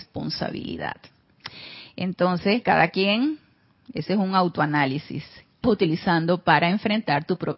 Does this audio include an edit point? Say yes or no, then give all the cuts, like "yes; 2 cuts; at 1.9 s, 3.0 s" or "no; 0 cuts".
yes; 1 cut; at 5.6 s